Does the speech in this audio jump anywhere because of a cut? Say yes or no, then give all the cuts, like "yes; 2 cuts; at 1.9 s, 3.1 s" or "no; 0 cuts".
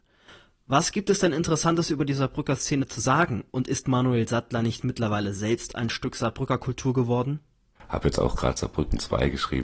no; 0 cuts